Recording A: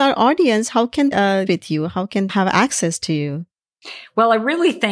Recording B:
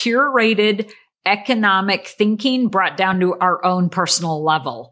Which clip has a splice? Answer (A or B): A